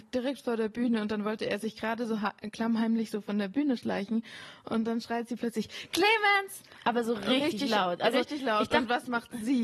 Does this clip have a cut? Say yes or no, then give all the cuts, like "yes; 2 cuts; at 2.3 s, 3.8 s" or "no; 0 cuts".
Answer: no; 0 cuts